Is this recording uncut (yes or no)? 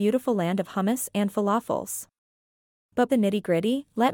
no